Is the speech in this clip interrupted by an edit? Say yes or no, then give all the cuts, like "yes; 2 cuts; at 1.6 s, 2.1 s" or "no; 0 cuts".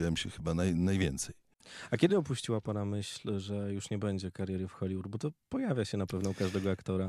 no; 0 cuts